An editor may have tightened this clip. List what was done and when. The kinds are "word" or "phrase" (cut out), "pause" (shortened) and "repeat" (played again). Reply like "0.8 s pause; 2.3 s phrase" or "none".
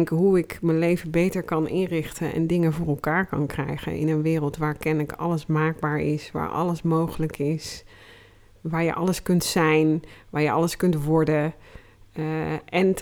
none